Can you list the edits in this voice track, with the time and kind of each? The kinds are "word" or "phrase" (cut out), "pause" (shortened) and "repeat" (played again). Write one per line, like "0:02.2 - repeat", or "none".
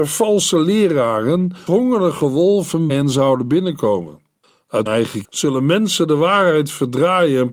0:01.7 - word
0:02.9 - word
0:04.9 - word
0:05.2 - word